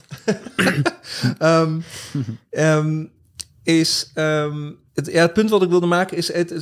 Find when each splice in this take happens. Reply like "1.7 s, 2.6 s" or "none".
4.9 s